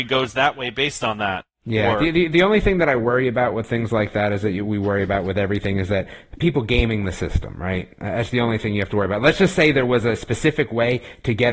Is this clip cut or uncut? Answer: uncut